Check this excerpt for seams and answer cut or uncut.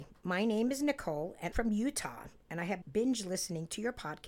cut